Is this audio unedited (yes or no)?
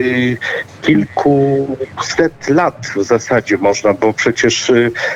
yes